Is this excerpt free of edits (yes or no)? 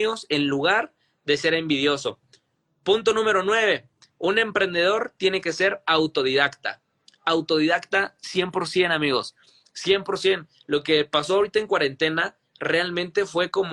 yes